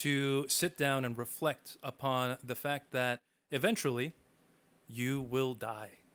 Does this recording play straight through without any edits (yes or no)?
yes